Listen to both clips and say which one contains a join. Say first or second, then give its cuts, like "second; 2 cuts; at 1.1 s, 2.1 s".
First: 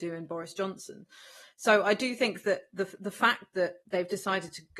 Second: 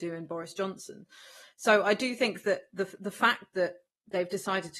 first; 1 cut; at 3.8 s